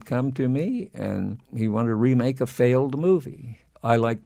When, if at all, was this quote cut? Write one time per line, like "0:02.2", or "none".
0:01.4